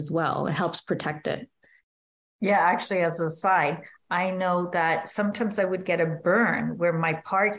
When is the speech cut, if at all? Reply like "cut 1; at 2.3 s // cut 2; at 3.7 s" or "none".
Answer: none